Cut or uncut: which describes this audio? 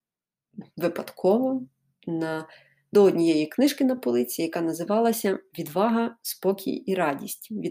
uncut